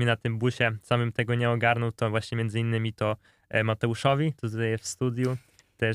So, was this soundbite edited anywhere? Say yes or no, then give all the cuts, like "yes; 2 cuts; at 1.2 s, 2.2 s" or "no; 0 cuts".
no; 0 cuts